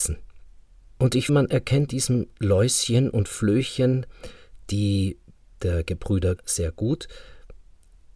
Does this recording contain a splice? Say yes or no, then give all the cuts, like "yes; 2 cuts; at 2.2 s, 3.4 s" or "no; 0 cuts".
yes; 4 cuts; at 1.3 s, 1.9 s, 5.5 s, 6.4 s